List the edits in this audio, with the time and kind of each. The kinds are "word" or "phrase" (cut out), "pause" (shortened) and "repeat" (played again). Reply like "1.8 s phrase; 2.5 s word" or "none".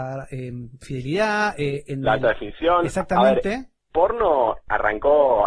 3.9 s word